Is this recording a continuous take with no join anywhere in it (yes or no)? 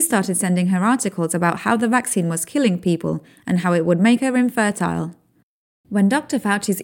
yes